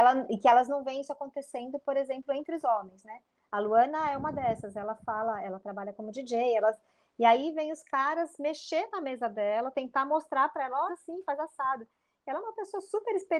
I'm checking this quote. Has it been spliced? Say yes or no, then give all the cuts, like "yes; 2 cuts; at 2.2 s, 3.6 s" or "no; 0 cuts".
yes; 1 cut; at 10.9 s